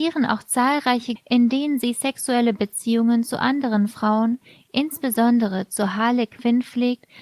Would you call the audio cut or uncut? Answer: cut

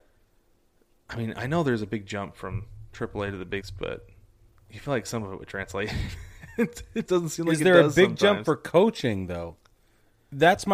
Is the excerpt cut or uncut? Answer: cut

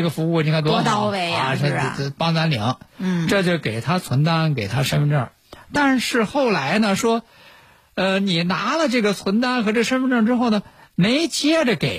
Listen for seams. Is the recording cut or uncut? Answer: uncut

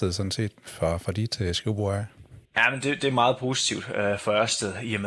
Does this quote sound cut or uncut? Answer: cut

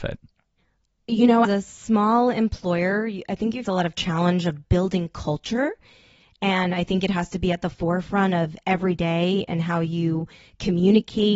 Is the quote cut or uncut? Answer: cut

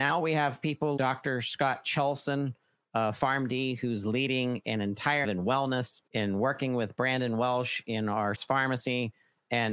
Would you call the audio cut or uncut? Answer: cut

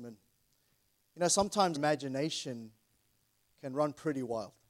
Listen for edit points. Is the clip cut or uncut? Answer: cut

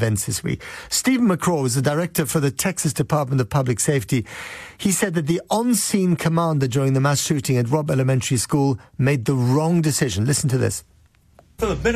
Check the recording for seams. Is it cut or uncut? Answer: uncut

